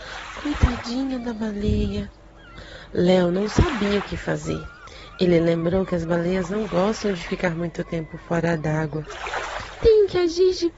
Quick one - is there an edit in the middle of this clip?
no; 0 cuts

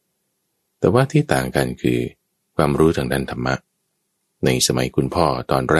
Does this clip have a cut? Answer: no; 0 cuts

